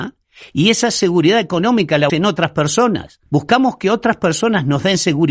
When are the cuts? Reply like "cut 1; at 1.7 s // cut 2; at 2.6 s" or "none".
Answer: cut 1; at 2.1 s // cut 2; at 3.3 s

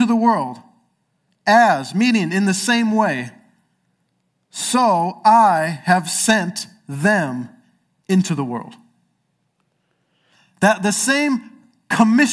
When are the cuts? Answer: none

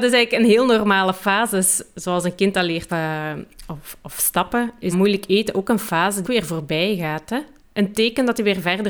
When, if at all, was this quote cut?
cut 1; at 2.9 s // cut 2; at 4.9 s // cut 3; at 6.2 s // cut 4; at 7.6 s

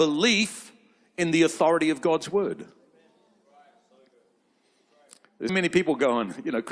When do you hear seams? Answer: cut 1; at 5.5 s

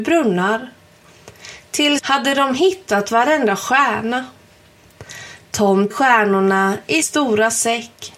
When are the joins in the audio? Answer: cut 1; at 2.0 s // cut 2; at 5.9 s // cut 3; at 7.0 s

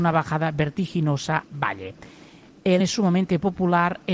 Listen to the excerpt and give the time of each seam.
cut 1; at 1.4 s // cut 2; at 2.8 s

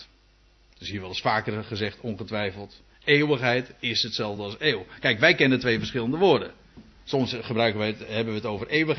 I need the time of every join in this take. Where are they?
none

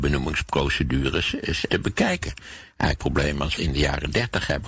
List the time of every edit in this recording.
cut 1; at 1.7 s // cut 2; at 3.0 s // cut 3; at 3.6 s

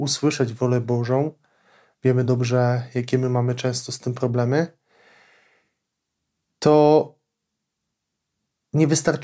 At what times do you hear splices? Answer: none

